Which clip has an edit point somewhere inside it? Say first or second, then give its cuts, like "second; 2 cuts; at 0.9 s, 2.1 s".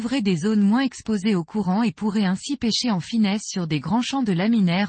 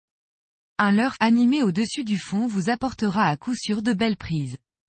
second; 1 cut; at 1.1 s